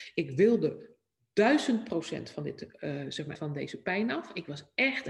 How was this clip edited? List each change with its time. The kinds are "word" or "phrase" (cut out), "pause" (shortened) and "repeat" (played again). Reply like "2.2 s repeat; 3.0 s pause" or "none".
3.4 s word